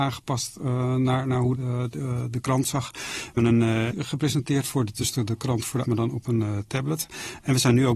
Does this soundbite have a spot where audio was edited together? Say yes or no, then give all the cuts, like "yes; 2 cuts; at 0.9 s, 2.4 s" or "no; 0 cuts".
yes; 6 cuts; at 1.5 s, 2.6 s, 3.4 s, 3.9 s, 5.0 s, 5.8 s